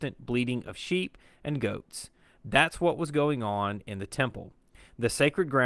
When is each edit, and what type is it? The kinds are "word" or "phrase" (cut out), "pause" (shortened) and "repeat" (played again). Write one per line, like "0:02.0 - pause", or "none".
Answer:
none